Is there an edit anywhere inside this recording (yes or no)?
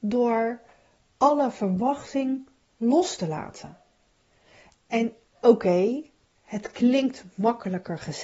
no